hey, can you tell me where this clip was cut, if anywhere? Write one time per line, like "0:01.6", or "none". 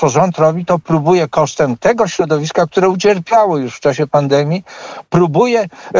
none